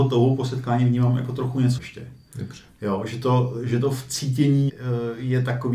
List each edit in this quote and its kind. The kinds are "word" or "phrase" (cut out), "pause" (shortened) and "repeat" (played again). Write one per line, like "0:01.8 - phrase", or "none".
0:01.8 - word
0:04.7 - word